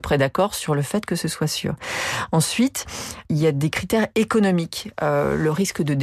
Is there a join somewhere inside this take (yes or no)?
no